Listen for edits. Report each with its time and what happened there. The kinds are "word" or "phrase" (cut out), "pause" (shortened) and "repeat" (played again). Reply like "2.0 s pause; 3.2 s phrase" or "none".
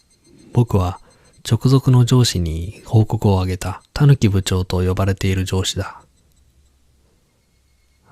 1.3 s pause; 3.9 s pause